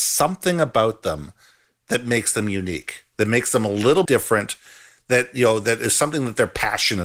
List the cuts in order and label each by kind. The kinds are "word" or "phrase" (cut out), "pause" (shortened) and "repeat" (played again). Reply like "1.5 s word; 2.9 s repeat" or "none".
4.1 s word